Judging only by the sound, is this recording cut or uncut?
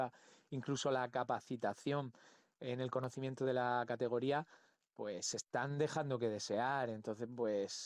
uncut